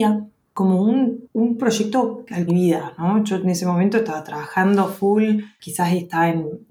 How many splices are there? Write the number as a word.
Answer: one